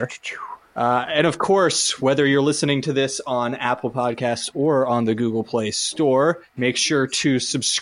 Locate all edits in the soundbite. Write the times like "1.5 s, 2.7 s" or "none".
6.5 s

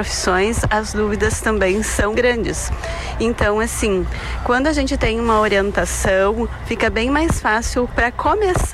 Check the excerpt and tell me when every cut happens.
2.1 s

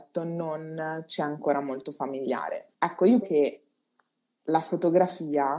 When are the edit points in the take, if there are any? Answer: 2.7 s, 3.2 s

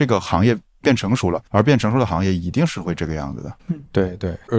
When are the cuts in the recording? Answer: 1.5 s

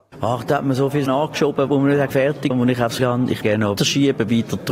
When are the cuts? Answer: 1.1 s, 1.7 s, 2.1 s, 2.5 s, 3.0 s, 3.4 s, 3.8 s

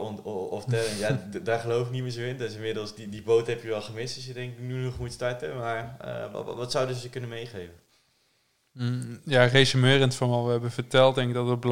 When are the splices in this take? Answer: none

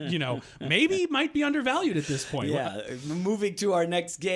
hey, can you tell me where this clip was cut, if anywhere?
none

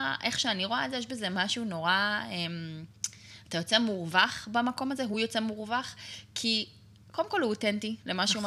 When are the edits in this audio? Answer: none

